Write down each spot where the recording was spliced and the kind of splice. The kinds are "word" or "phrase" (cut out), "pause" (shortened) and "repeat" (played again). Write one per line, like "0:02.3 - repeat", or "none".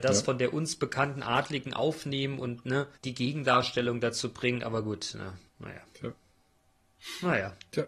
0:03.0 - pause
0:05.5 - pause